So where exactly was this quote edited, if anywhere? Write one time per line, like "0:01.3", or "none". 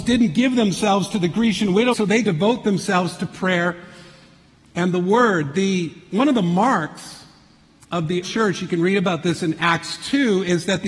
0:01.9
0:02.2
0:08.2